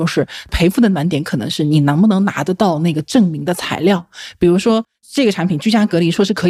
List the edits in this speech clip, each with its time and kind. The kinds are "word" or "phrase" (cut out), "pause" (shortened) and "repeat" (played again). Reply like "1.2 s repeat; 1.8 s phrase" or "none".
none